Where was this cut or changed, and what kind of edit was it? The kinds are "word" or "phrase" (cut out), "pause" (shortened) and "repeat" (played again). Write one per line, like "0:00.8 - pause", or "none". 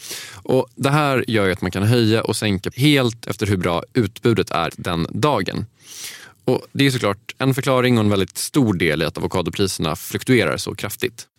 0:02.7 - word
0:04.7 - word